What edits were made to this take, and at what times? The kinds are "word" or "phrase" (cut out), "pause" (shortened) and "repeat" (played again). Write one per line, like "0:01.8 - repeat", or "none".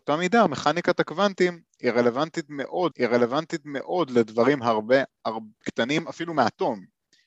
0:02.9 - repeat
0:05.6 - word

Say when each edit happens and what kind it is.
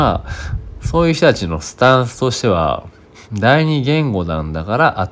0:03.2 - pause

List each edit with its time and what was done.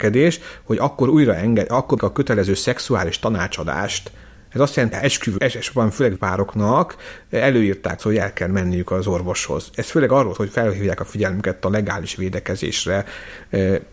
0:02.0 - word
0:04.9 - word
0:05.4 - word
0:06.2 - word
0:08.0 - word
0:10.3 - word

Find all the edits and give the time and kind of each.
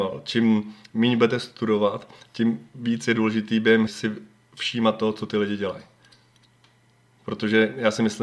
0:03.9 - word

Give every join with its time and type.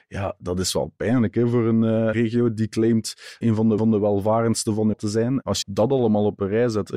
0:02.1 - word
0:03.4 - word
0:03.8 - repeat
0:04.9 - word
0:05.6 - word

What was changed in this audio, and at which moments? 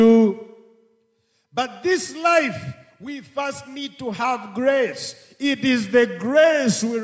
none

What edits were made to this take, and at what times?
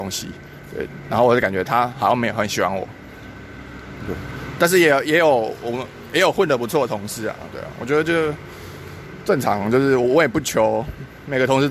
none

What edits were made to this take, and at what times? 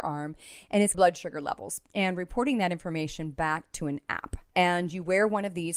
0:00.9 - phrase

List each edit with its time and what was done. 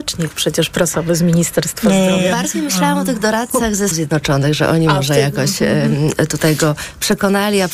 0:03.9 - word

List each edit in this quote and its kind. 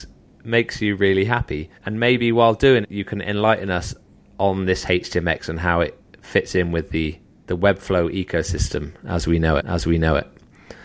0:01.7 - pause
0:02.8 - word
0:04.0 - pause
0:07.2 - pause
0:09.6 - repeat

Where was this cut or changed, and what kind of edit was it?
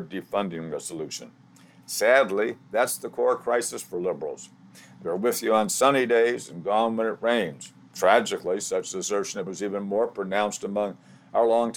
0:09.5 - word

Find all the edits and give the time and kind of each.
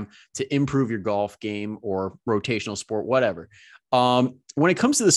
none

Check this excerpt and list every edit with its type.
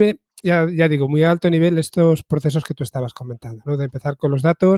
none

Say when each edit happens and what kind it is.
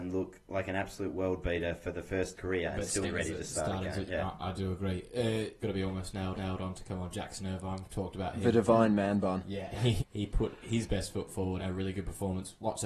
0:02.3 - phrase
0:03.0 - word
0:04.1 - word
0:05.6 - phrase
0:06.3 - repeat
0:10.0 - word
0:11.6 - word

